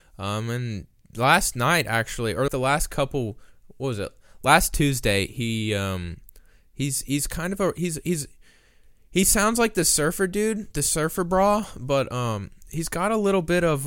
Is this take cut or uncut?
cut